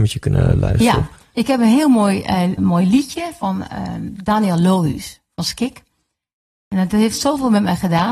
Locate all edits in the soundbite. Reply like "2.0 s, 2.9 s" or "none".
2.6 s